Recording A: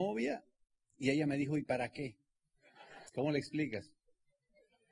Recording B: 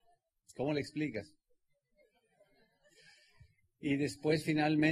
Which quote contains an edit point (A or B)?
A